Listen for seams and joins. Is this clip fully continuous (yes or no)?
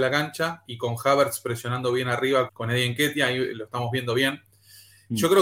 no